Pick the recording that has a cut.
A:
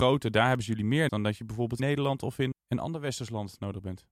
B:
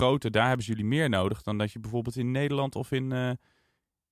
A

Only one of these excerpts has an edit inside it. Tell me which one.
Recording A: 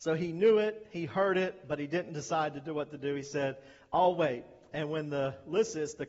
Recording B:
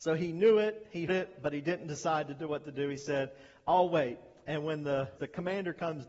B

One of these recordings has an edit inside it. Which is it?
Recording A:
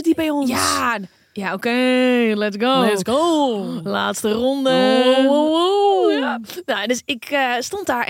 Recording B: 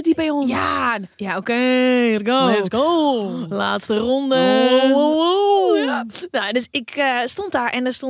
B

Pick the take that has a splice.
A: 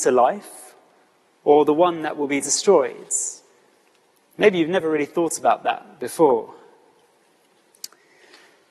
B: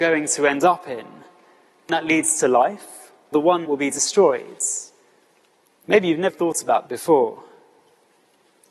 B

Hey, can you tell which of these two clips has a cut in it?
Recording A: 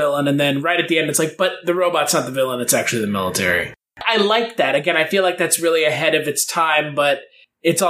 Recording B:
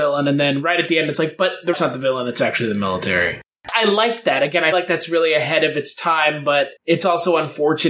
B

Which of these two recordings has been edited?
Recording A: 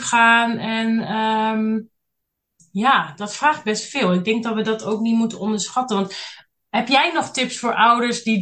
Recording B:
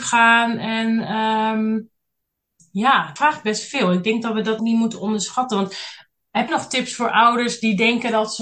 B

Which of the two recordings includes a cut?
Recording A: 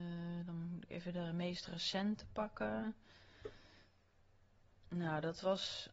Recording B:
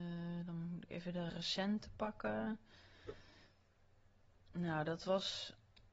B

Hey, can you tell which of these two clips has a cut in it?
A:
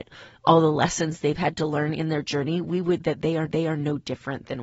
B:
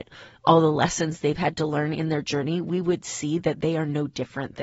A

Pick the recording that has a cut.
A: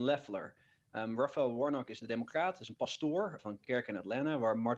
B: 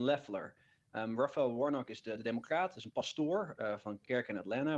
A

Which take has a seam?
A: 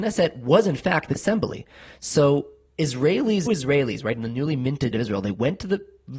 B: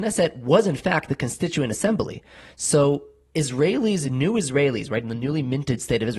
A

